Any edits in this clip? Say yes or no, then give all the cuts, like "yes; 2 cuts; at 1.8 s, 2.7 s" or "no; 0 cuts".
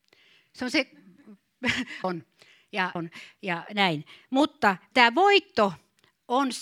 yes; 3 cuts; at 2.0 s, 3.0 s, 4.9 s